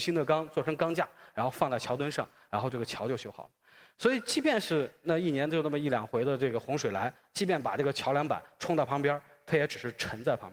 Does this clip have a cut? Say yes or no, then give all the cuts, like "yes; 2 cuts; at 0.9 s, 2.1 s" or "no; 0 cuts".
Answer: no; 0 cuts